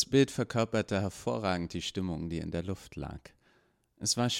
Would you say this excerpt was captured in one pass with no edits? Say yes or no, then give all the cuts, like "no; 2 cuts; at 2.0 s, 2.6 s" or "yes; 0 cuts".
yes; 0 cuts